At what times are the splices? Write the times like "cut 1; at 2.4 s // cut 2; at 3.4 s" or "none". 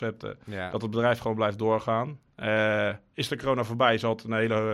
none